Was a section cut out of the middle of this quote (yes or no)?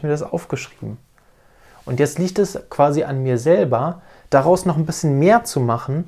no